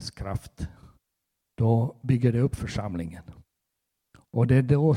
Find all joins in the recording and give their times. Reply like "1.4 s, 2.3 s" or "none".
none